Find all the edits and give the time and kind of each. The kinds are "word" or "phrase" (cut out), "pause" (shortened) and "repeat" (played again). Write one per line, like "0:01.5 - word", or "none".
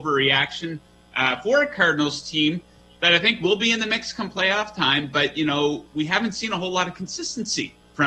none